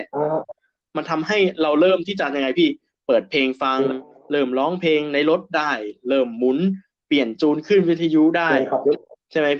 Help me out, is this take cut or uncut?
uncut